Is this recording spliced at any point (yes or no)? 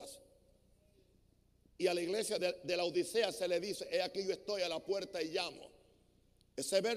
no